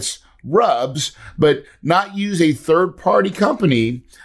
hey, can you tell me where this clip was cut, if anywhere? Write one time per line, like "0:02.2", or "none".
none